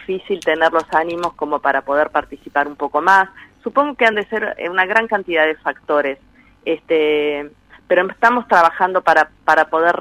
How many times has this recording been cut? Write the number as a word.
zero